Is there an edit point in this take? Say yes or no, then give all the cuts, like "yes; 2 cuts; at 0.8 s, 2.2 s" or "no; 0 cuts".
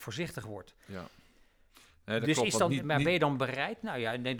no; 0 cuts